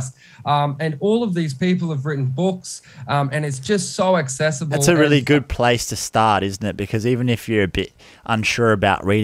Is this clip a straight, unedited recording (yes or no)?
yes